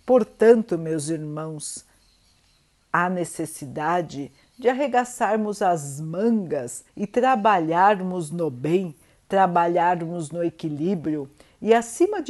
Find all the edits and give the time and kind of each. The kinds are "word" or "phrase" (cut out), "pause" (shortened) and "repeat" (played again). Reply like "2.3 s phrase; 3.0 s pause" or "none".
6.9 s pause